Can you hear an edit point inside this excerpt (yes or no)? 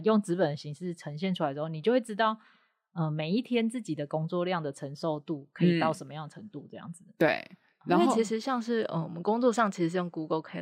no